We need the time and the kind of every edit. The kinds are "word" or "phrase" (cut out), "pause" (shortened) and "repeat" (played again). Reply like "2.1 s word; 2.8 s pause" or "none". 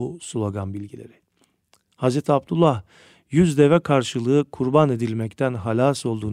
none